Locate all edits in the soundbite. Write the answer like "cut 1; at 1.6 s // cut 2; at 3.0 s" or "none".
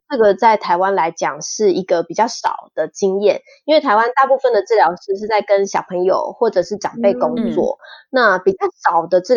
none

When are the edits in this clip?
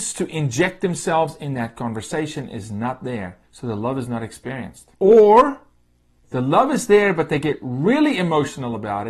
cut 1; at 3.4 s // cut 2; at 4.9 s

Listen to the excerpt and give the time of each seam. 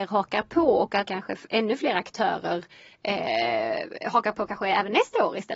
cut 1; at 1.1 s

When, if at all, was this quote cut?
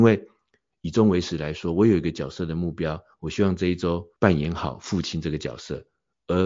cut 1; at 4.2 s

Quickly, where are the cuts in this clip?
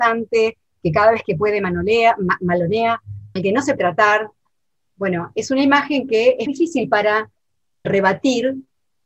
cut 1; at 3.4 s // cut 2; at 3.8 s // cut 3; at 6.5 s // cut 4; at 7.8 s

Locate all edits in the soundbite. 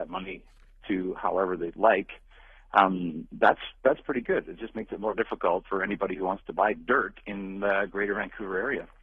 none

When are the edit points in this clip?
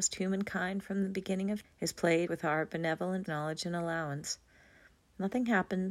cut 1; at 1.6 s // cut 2; at 2.3 s // cut 3; at 3.3 s

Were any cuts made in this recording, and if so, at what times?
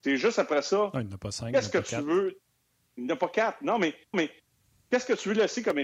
cut 1; at 4.1 s

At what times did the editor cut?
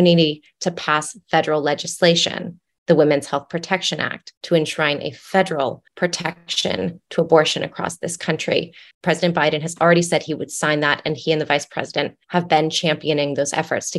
cut 1; at 4.4 s // cut 2; at 5.9 s // cut 3; at 8.9 s // cut 4; at 12.2 s

